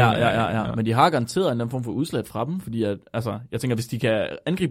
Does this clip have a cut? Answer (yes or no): no